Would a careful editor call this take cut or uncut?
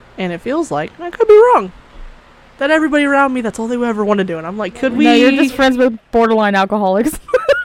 uncut